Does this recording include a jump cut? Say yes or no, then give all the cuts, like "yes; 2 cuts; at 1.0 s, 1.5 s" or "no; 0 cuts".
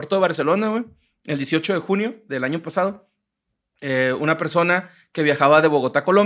no; 0 cuts